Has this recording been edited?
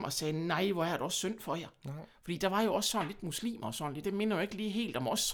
yes; 1 cut; at 4.0 s

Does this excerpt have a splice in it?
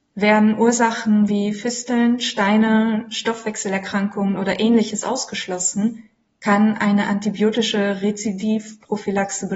no; 0 cuts

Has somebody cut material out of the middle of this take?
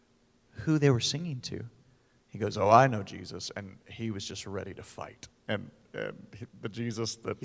no; 0 cuts

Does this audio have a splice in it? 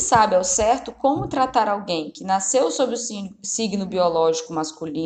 no; 0 cuts

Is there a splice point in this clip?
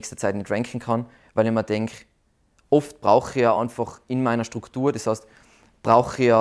no; 0 cuts

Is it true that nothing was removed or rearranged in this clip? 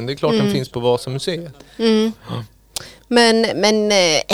yes; 0 cuts

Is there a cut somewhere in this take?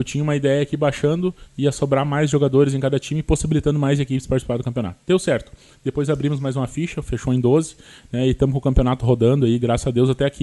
no; 0 cuts

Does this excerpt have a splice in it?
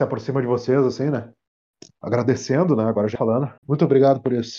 yes; 3 cuts; at 1.5 s, 3.2 s, 3.6 s

